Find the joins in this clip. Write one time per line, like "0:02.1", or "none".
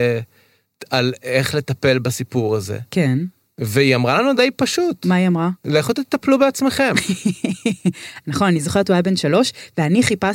0:04.4

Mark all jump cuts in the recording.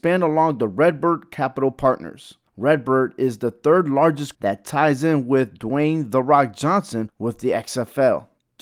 0:04.3

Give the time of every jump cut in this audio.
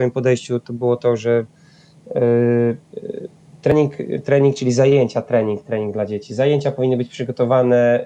0:03.4

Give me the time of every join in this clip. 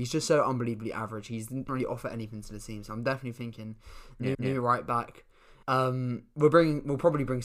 0:01.7
0:04.3
0:05.6

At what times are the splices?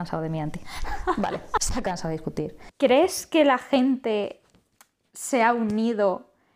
none

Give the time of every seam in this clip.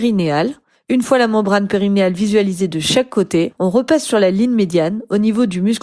none

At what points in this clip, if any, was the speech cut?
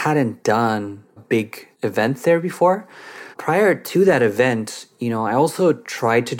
0:01.2
0:01.7
0:03.3

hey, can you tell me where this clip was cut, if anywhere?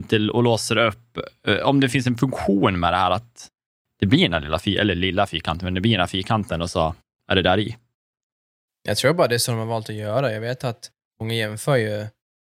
none

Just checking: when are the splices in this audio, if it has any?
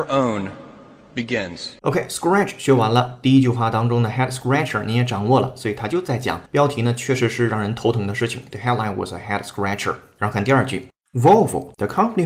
0:01.8
0:06.5

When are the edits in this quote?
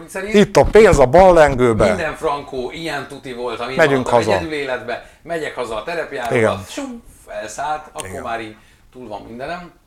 none

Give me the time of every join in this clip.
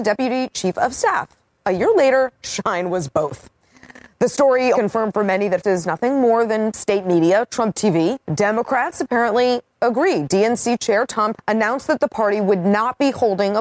0:04.7
0:05.6
0:08.2
0:11.3

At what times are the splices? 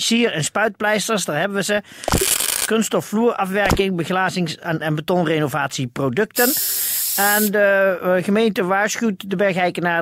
0:04.8

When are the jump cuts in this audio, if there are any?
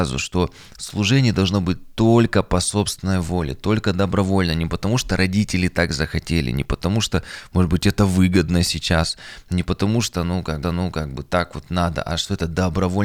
0:10.6

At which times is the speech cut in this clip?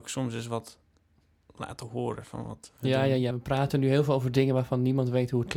0:03.3

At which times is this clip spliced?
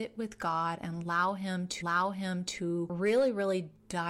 0:01.8

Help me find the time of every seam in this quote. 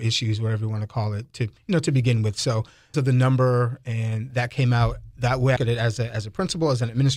0:02.9
0:04.3
0:05.6

